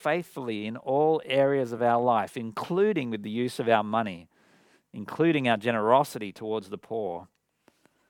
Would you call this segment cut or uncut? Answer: uncut